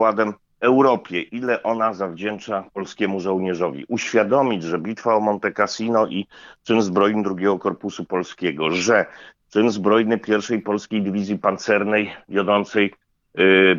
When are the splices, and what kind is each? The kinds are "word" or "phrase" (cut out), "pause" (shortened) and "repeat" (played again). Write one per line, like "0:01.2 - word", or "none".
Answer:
none